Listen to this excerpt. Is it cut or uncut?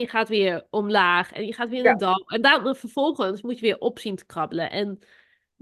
uncut